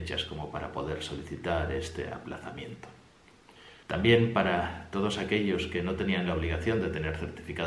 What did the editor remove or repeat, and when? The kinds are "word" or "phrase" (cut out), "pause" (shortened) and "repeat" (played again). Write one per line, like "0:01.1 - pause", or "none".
0:03.8 - pause

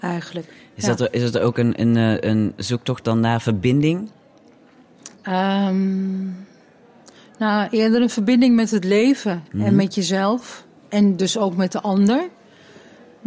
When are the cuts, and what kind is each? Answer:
0:05.1 - pause

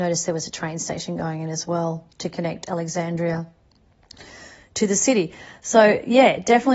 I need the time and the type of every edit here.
0:02.1 - pause

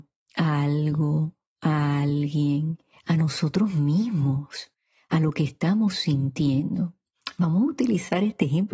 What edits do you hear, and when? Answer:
none

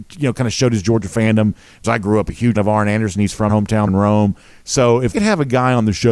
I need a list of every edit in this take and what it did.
0:01.8 - word
0:02.5 - word
0:03.5 - word
0:03.9 - word
0:05.1 - word

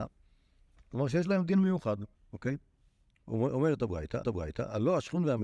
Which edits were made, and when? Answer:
0:02.1 - pause
0:04.2 - repeat

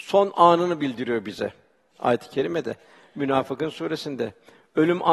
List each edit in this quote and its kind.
none

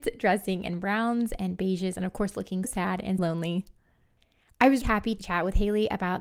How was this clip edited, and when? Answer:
0:02.6 - word
0:03.2 - word
0:04.8 - word
0:05.2 - word

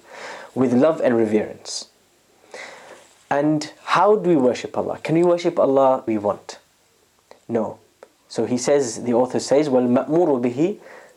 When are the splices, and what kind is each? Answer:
0:06.1 - phrase

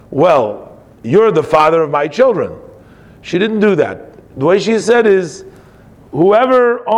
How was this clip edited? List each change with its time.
none

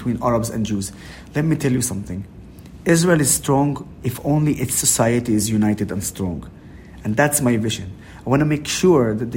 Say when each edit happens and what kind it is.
none

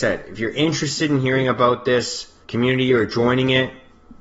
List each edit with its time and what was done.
0:02.4 - pause

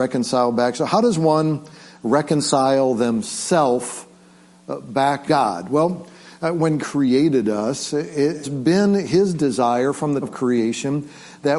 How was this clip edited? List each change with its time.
0:05.3 - word
0:06.8 - word
0:08.4 - word
0:10.2 - word

